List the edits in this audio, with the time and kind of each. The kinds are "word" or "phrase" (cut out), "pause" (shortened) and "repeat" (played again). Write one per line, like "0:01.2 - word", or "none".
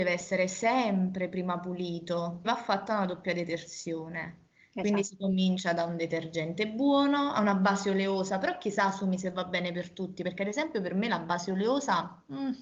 0:02.4 - word